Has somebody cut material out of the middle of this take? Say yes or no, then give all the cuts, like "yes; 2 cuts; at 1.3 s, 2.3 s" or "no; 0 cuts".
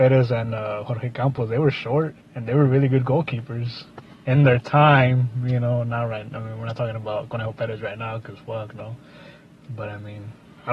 no; 0 cuts